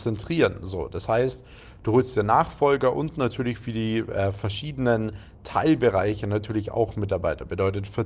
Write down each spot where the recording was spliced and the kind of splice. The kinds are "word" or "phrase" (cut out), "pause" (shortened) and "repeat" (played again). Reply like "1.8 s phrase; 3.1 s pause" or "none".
none